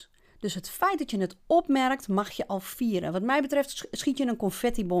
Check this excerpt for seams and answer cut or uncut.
uncut